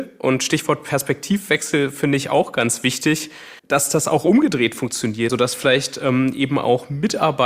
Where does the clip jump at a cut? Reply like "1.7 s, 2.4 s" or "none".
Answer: 3.6 s, 5.3 s

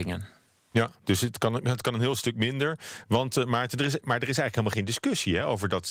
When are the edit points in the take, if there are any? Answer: none

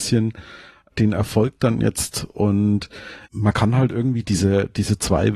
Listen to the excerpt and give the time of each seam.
3.3 s

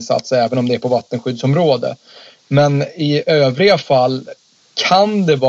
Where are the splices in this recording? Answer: none

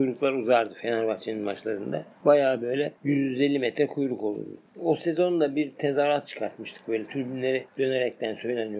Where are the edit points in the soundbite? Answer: none

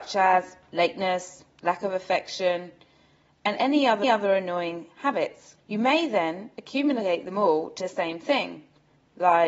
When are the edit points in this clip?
4.0 s, 5.6 s, 7.8 s

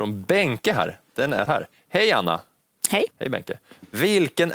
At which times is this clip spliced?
1.5 s, 3.1 s

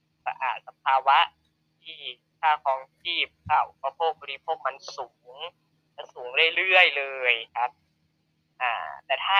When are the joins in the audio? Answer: 7.5 s

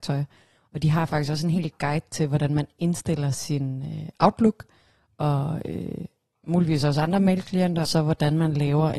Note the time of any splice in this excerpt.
7.9 s

